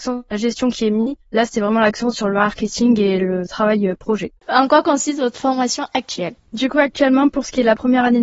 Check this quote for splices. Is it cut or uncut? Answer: cut